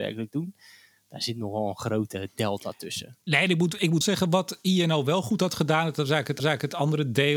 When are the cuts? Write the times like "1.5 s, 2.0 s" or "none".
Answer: 3.2 s, 4.0 s, 6.4 s